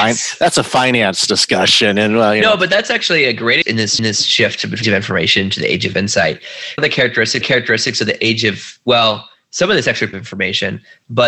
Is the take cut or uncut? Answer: cut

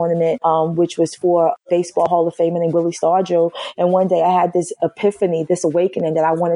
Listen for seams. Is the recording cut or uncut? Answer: uncut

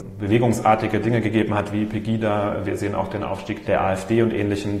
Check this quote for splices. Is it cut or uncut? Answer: uncut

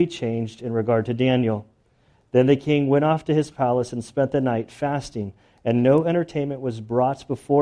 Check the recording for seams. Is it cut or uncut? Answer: uncut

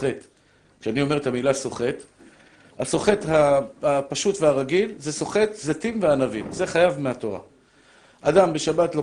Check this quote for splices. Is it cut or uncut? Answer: uncut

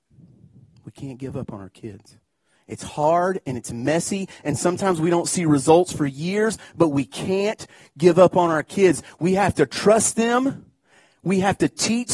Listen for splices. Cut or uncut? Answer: uncut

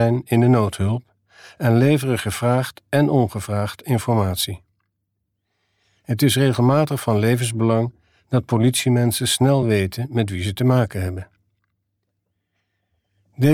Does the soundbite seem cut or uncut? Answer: uncut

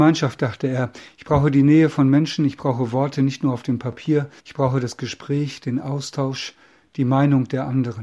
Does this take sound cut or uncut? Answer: cut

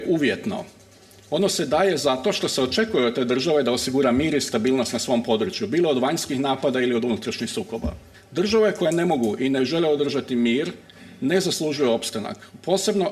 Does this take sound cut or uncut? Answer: cut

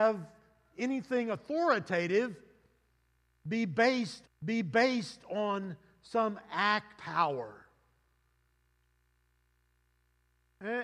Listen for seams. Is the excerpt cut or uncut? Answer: cut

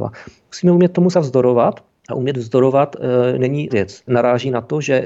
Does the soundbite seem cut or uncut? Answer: cut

